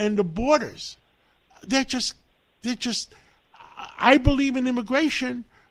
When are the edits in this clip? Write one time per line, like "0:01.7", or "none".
none